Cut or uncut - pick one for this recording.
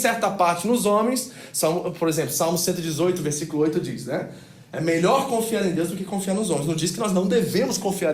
uncut